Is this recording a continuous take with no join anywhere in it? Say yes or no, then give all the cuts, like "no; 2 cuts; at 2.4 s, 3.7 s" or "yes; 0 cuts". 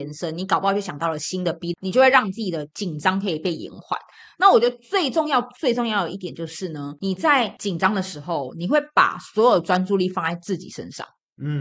no; 1 cut; at 1.7 s